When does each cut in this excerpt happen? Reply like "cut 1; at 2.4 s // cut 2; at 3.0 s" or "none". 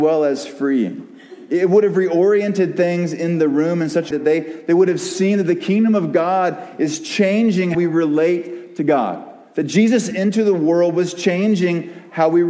cut 1; at 4.1 s // cut 2; at 7.7 s // cut 3; at 10.1 s